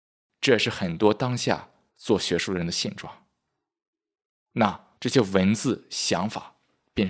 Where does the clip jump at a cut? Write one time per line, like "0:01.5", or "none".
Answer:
0:01.9
0:05.0